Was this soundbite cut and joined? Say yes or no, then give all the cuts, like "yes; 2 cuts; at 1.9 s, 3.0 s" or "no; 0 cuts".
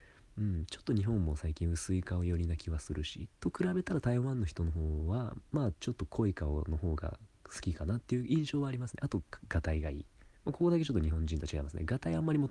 yes; 2 cuts; at 3.3 s, 5.5 s